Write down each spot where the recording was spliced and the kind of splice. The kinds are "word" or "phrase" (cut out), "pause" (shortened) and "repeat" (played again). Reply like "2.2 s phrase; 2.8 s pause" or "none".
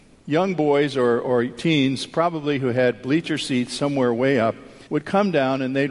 4.9 s pause

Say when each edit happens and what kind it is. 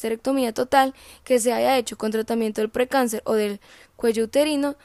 none

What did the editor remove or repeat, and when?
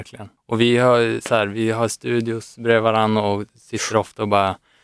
none

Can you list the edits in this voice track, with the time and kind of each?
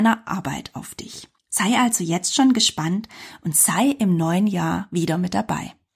1.4 s pause

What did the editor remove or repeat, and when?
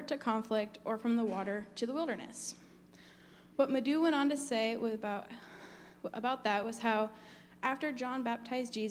none

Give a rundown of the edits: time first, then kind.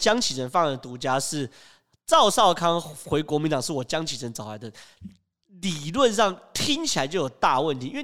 none

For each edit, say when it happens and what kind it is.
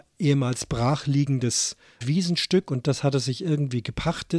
2.0 s phrase

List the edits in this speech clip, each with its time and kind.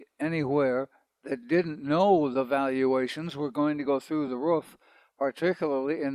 none

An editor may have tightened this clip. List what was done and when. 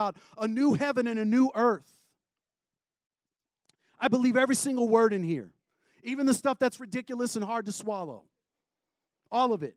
none

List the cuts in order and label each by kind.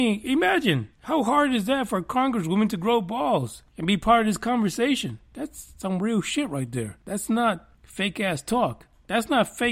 0.9 s pause; 3.7 s pause; 7.0 s pause; 7.7 s pause

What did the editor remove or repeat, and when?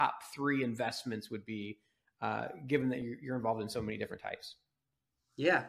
none

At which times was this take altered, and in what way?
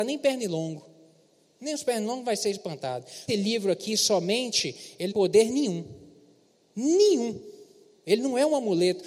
3.3 s phrase; 5.1 s phrase

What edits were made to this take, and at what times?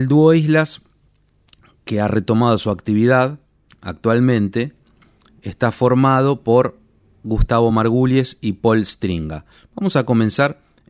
none

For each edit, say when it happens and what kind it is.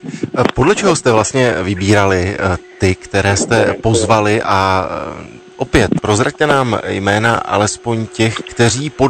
none

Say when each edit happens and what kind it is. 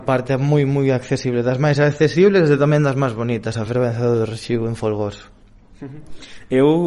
none

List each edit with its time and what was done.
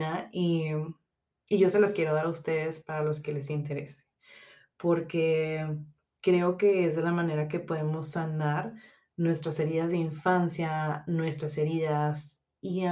none

